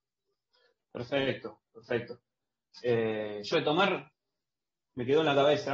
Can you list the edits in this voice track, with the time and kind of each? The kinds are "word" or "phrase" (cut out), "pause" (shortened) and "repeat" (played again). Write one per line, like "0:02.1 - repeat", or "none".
0:03.5 - word